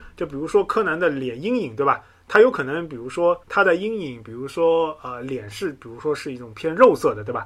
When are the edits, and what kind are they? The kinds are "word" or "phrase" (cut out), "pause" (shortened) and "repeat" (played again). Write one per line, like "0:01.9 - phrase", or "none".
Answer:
0:03.4 - pause